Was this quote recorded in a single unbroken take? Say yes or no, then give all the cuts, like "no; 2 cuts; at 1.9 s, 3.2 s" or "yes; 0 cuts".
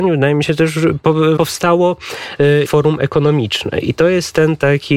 no; 2 cuts; at 1.4 s, 2.7 s